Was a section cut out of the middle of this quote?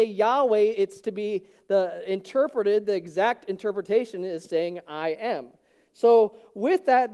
no; 0 cuts

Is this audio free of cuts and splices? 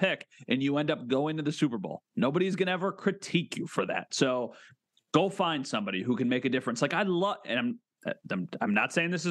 yes; 0 cuts

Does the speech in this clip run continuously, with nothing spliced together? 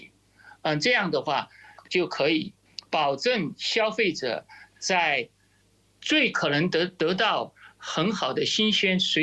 yes; 0 cuts

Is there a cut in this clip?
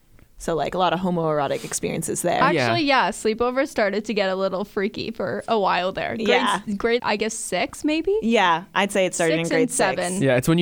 yes; 1 cut; at 7.0 s

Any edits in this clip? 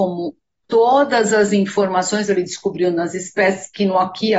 no; 0 cuts

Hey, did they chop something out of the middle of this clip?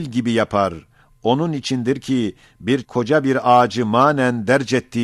yes; 1 cut; at 2.8 s

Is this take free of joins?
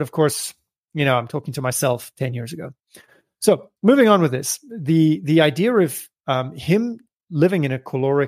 no; 1 cut; at 3.8 s

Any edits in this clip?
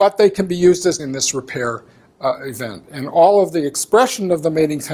yes; 1 cut; at 1.0 s

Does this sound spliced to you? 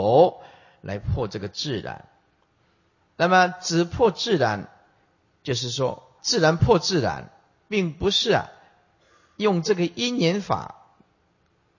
yes; 2 cuts; at 3.0 s, 6.2 s

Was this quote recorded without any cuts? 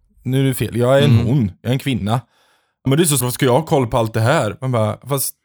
no; 2 cuts; at 2.9 s, 3.2 s

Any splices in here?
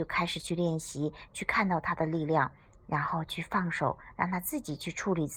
no; 0 cuts

